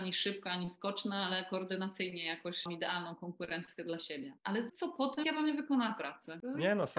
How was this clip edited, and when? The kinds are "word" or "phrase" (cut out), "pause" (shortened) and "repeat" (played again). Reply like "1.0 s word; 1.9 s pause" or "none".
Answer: 2.7 s word; 4.7 s word; 5.2 s word